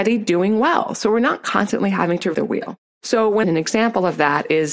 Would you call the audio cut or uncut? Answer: cut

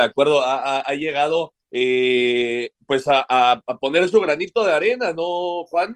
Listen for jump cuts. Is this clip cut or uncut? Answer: cut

